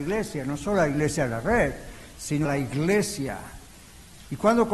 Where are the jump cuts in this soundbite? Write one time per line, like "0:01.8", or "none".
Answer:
0:02.4